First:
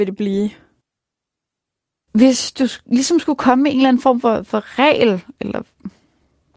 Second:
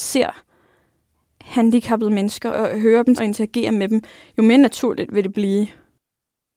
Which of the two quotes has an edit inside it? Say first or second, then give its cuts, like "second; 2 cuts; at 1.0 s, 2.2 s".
second; 2 cuts; at 2.5 s, 3.2 s